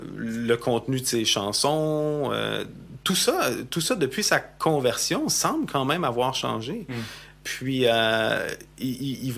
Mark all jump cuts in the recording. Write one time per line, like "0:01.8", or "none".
none